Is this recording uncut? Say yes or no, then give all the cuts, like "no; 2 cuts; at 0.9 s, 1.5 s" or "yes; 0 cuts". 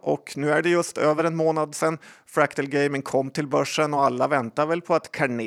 yes; 0 cuts